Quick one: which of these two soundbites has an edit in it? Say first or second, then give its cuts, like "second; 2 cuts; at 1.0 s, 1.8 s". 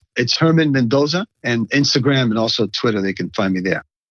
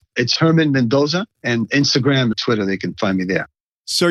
second; 1 cut; at 2.3 s